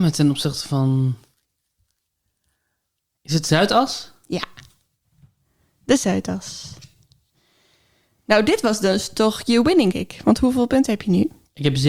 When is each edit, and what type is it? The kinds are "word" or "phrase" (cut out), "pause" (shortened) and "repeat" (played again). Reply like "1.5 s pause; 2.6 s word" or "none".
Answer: 9.9 s phrase